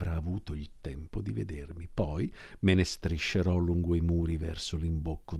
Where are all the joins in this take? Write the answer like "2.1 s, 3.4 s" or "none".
none